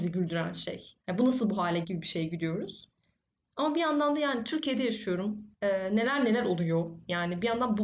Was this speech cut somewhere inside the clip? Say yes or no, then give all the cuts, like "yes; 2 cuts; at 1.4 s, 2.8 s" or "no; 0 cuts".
yes; 3 cuts; at 1.0 s, 1.8 s, 5.5 s